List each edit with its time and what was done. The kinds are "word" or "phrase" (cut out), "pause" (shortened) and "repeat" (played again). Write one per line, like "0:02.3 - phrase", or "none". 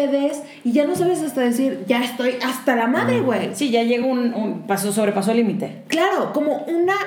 none